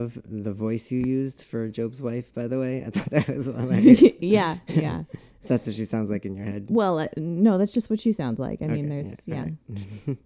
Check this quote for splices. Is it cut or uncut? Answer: uncut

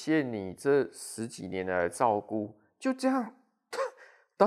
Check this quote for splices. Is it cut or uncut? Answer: uncut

